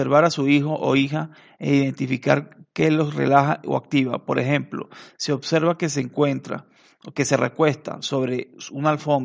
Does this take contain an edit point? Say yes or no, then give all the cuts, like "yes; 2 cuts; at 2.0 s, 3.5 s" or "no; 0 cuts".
no; 0 cuts